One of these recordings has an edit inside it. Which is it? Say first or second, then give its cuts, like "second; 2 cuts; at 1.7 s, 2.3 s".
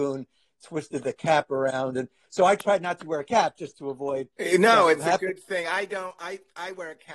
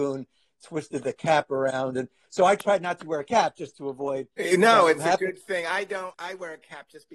second; 1 cut; at 6.1 s